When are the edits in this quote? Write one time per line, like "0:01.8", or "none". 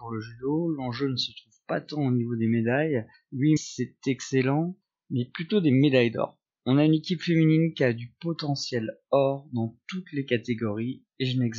0:03.6

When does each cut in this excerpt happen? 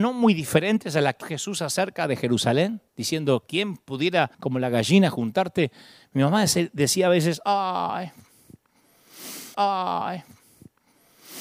0:01.2
0:02.9
0:04.3
0:09.5

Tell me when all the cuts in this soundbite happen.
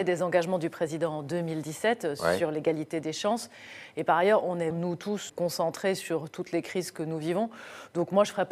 0:04.7
0:05.3

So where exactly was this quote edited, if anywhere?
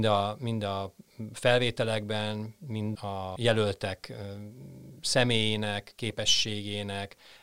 0:02.9
0:03.4

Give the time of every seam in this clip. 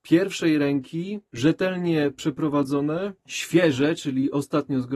0:01.3
0:03.2

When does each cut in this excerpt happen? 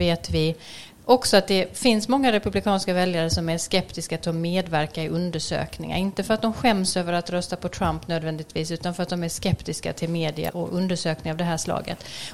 0:10.5

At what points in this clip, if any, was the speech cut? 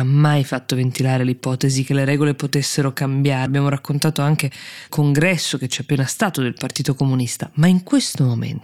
0:03.5
0:04.9

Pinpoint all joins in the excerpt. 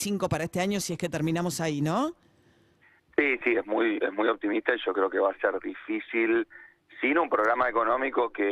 none

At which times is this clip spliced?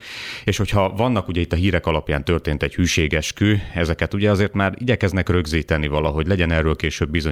none

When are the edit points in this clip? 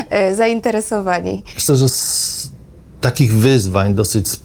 0:01.7

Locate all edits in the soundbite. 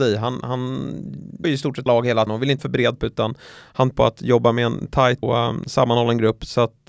0:01.4
0:01.9
0:02.3
0:02.6
0:03.0
0:03.9
0:05.2

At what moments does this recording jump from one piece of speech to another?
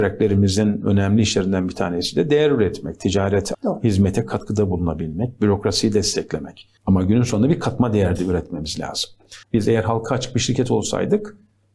0:03.5
0:06.8
0:09.4

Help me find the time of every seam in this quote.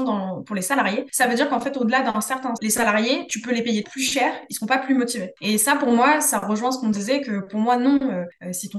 0:02.6
0:03.8

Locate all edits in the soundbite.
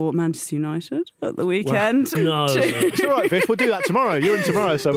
0:02.1

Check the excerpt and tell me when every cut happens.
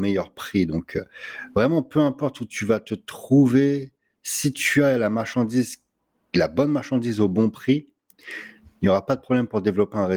none

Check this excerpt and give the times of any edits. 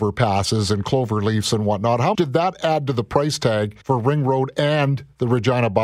0:02.1
0:03.8

